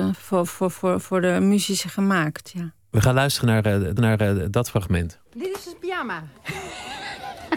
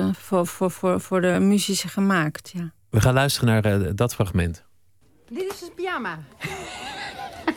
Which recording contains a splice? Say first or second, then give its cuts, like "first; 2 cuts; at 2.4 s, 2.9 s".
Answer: first; 2 cuts; at 4.0 s, 5.3 s